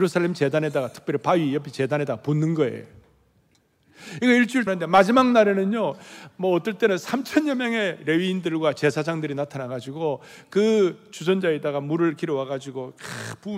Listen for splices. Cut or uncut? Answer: cut